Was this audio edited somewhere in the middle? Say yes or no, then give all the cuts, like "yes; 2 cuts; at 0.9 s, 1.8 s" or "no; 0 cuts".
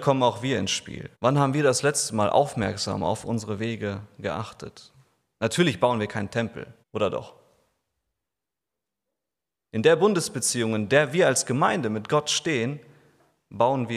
yes; 2 cuts; at 1.1 s, 6.8 s